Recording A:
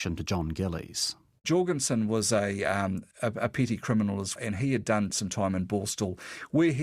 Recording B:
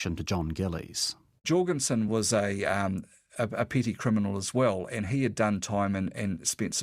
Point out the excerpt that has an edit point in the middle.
A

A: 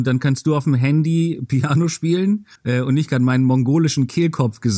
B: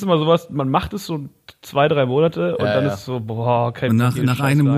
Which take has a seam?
A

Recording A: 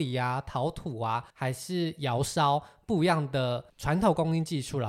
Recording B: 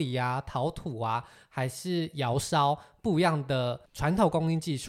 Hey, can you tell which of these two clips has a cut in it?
A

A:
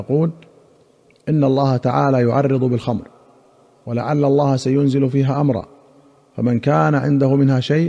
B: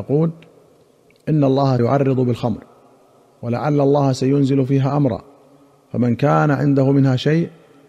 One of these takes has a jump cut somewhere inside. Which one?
B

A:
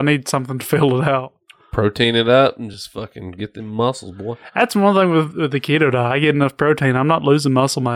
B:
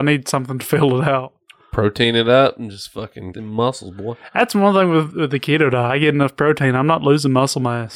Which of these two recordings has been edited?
B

